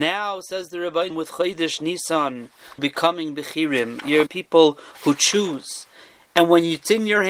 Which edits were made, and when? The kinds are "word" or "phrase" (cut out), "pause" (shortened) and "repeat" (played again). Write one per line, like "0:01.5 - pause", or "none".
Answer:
0:01.1 - word
0:02.8 - word
0:04.3 - word